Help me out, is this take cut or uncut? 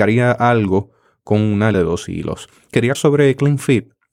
cut